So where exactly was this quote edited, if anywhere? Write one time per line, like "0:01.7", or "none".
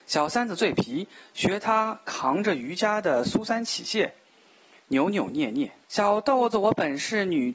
0:05.8